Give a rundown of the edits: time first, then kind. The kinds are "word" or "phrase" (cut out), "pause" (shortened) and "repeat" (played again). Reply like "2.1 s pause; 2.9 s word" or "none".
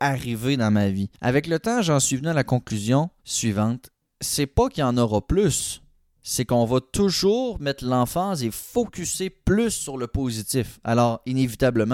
1.1 s pause; 3.2 s pause